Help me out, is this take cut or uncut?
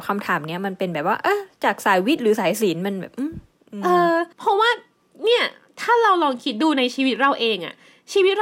cut